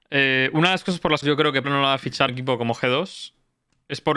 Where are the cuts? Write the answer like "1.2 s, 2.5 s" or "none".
1.2 s, 1.6 s, 2.3 s